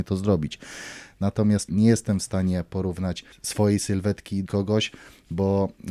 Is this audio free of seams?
no; 3 cuts; at 1.7 s, 3.3 s, 4.5 s

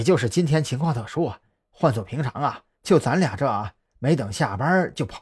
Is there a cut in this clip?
yes; 1 cut; at 2.7 s

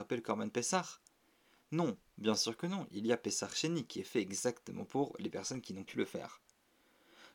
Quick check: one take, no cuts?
no; 1 cut; at 5.9 s

